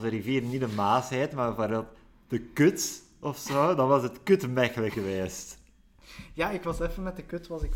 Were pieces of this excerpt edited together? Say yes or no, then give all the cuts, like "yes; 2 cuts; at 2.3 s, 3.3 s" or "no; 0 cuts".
no; 0 cuts